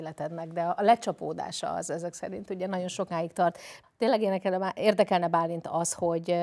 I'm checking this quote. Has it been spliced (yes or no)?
no